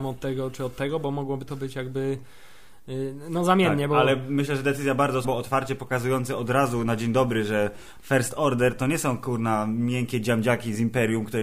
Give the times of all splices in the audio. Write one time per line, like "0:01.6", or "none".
0:05.2